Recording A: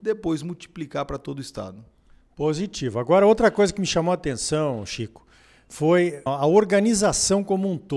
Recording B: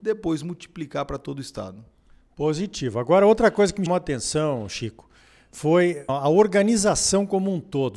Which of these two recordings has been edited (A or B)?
B